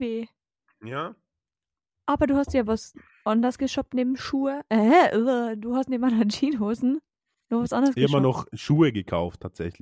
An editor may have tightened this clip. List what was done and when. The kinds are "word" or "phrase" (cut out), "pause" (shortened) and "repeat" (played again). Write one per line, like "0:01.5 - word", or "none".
none

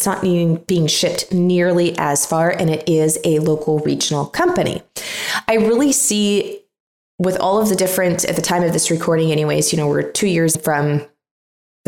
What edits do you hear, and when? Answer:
0:10.5 - word

